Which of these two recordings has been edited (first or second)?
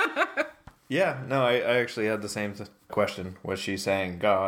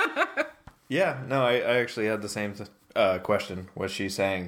first